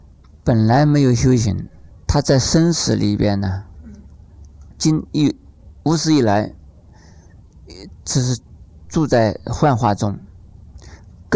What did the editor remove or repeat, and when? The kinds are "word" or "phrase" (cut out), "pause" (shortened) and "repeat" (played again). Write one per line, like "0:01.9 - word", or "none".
0:01.9 - pause
0:04.7 - phrase